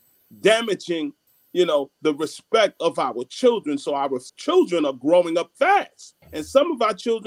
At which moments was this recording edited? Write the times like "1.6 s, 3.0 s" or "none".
1.3 s, 4.3 s, 6.2 s